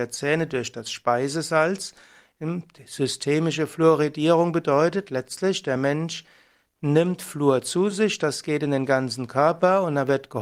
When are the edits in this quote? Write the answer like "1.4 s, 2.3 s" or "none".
none